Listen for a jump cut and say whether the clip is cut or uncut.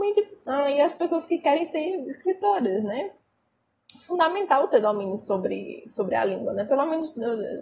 uncut